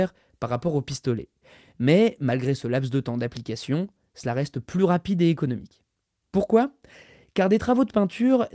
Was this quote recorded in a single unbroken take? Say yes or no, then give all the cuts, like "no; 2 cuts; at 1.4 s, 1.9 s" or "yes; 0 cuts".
yes; 0 cuts